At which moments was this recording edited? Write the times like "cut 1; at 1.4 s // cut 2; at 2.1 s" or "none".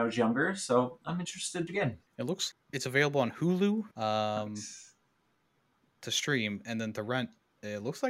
cut 1; at 1.7 s // cut 2; at 2.1 s // cut 3; at 2.5 s // cut 4; at 3.9 s